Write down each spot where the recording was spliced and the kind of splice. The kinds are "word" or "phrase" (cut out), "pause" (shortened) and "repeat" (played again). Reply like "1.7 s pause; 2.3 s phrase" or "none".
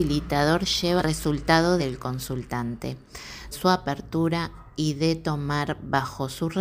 1.0 s phrase; 1.8 s word; 3.5 s word